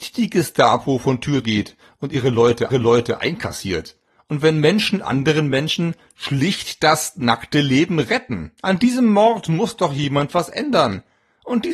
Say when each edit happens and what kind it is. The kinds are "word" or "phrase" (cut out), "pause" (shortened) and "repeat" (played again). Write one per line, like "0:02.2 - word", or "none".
0:01.4 - phrase
0:02.7 - repeat
0:08.6 - pause